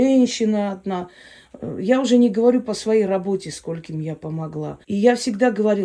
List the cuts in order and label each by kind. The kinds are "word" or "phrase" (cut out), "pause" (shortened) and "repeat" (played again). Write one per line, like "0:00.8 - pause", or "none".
0:04.8 - pause

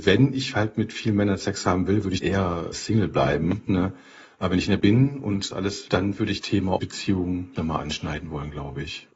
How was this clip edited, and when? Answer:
0:02.2 - word
0:02.7 - word
0:04.8 - word
0:05.5 - word
0:05.9 - word
0:06.4 - word
0:06.8 - word
0:07.5 - word

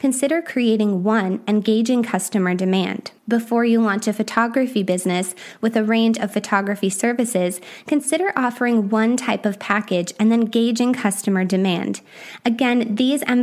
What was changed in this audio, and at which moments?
0:03.2 - pause

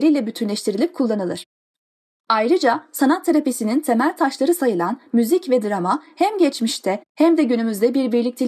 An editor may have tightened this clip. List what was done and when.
none

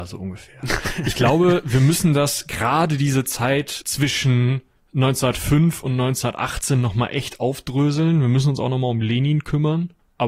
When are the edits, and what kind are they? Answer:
0:03.8 - word

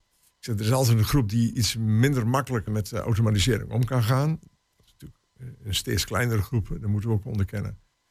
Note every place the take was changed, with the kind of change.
0:02.7 - word

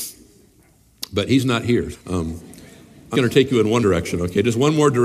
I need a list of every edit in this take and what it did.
0:01.9 - word
0:03.1 - word
0:03.8 - word

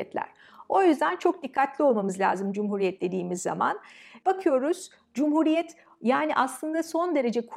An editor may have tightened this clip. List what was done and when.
none

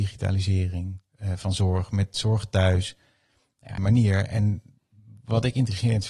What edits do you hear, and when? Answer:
0:03.8 - phrase

